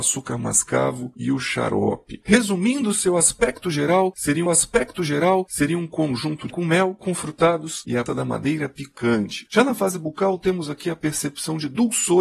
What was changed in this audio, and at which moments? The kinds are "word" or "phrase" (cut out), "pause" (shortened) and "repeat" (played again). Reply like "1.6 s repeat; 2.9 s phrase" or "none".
4.5 s repeat; 6.5 s word; 7.0 s word; 8.1 s word